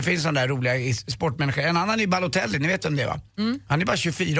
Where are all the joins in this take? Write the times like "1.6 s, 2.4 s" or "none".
3.3 s